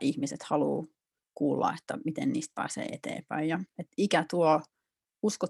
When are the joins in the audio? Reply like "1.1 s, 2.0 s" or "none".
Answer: none

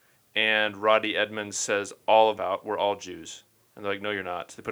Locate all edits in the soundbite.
2.3 s

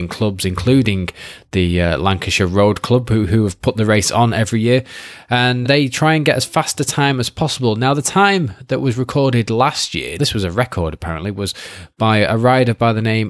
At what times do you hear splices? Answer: 5.6 s, 10.2 s

